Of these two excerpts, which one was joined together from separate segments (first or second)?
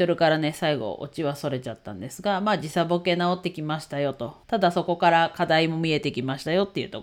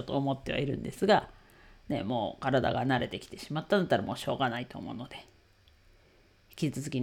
first